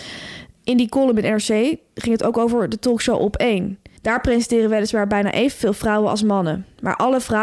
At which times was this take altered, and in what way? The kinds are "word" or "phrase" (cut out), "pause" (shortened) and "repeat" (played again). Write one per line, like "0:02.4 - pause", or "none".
0:04.0 - pause